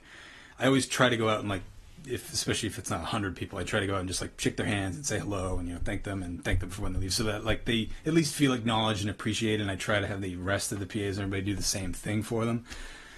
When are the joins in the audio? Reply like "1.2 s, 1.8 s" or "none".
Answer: none